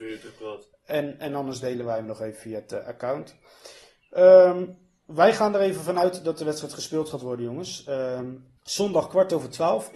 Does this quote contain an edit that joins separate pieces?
yes; 1 cut; at 8.6 s

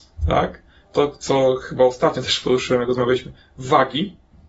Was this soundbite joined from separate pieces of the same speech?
no; 0 cuts

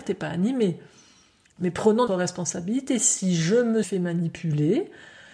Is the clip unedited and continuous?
no; 2 cuts; at 2.1 s, 3.8 s

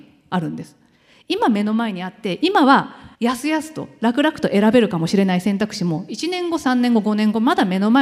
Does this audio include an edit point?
yes; 1 cut; at 3.1 s

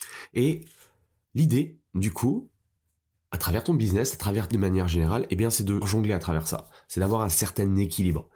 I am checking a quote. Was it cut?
yes; 2 cuts; at 4.5 s, 5.8 s

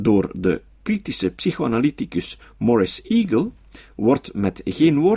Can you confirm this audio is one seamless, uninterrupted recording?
yes; 0 cuts

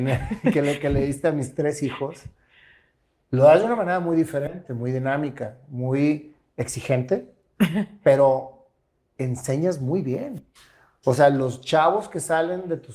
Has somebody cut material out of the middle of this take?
no; 0 cuts

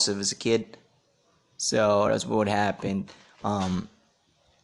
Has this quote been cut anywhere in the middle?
no; 0 cuts

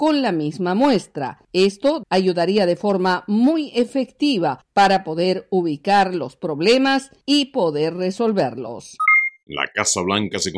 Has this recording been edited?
yes; 1 cut; at 2.0 s

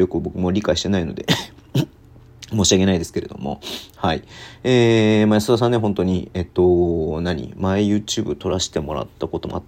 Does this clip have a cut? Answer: no; 0 cuts

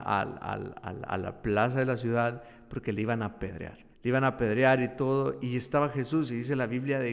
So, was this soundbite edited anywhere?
yes; 1 cut; at 3.9 s

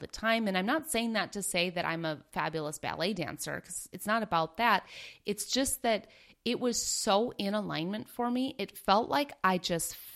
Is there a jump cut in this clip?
no; 0 cuts

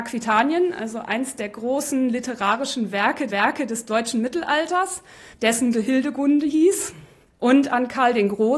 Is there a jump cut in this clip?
yes; 3 cuts; at 3.3 s, 5.7 s, 7.3 s

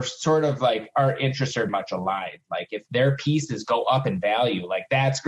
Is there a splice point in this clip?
yes; 1 cut; at 1.7 s

